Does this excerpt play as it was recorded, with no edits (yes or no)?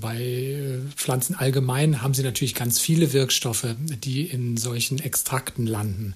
yes